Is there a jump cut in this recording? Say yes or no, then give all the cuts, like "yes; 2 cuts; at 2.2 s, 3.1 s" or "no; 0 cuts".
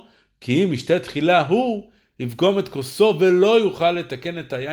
no; 0 cuts